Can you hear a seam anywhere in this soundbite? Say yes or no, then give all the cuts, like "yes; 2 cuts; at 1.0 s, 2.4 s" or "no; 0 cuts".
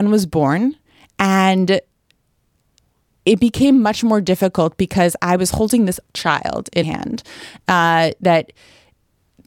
yes; 2 cuts; at 6.1 s, 6.8 s